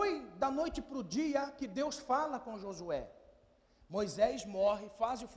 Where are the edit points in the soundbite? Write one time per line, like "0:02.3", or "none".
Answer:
none